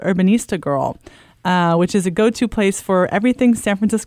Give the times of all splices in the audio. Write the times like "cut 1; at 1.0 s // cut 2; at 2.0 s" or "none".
none

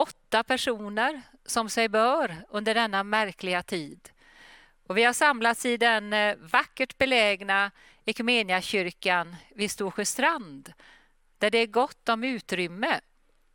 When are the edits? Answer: none

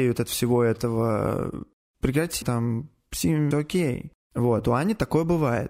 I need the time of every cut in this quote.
cut 1; at 2.4 s // cut 2; at 3.5 s

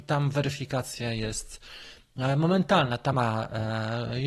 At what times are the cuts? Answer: cut 1; at 3.1 s

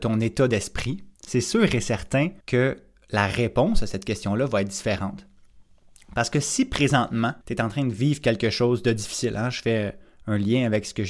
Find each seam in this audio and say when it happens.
cut 1; at 1.2 s // cut 2; at 2.4 s // cut 3; at 7.4 s

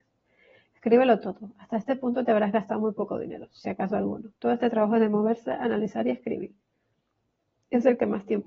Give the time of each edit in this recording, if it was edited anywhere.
cut 1; at 4.4 s

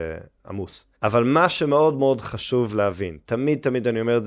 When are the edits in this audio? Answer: cut 1; at 0.9 s

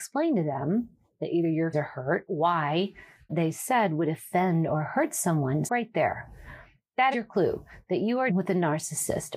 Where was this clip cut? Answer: cut 1; at 1.7 s // cut 2; at 2.3 s // cut 3; at 3.3 s // cut 4; at 5.7 s // cut 5; at 7.1 s // cut 6; at 8.3 s

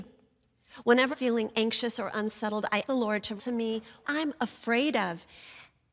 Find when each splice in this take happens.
cut 1; at 1.1 s // cut 2; at 2.9 s // cut 3; at 3.4 s // cut 4; at 4.0 s

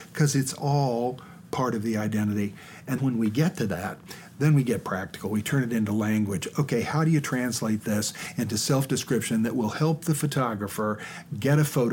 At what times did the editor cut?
cut 1; at 3.0 s

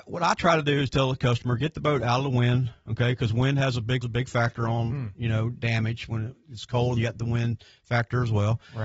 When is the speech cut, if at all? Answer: cut 1; at 4.0 s // cut 2; at 7.0 s

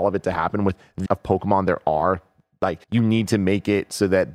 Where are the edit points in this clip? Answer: cut 1; at 1.1 s // cut 2; at 2.8 s

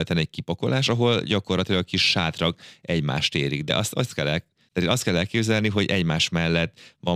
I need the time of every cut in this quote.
none

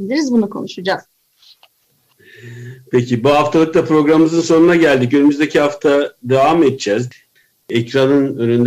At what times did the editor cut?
none

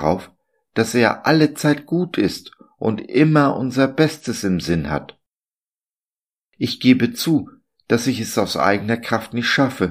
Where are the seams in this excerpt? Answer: none

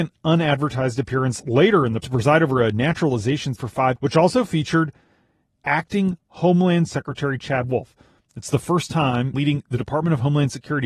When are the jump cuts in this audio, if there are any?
cut 1; at 2.0 s // cut 2; at 3.6 s // cut 3; at 4.0 s // cut 4; at 6.9 s // cut 5; at 9.3 s

